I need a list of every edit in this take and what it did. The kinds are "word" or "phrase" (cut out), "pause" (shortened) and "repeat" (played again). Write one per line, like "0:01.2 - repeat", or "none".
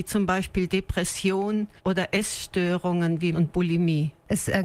0:01.8 - pause
0:03.3 - word